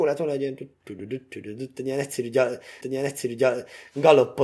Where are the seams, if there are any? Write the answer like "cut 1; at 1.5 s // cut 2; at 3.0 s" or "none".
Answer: cut 1; at 2.8 s